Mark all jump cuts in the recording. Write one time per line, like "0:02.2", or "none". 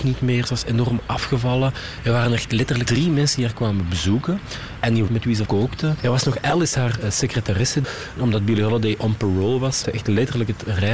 0:02.9
0:05.1
0:05.5
0:09.8